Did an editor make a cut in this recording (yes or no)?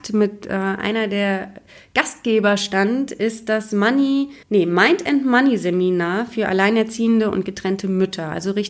yes